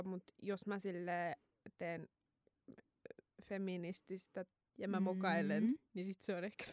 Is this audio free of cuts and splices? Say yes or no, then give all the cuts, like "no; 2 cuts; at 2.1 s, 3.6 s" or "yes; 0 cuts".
no; 1 cut; at 4.6 s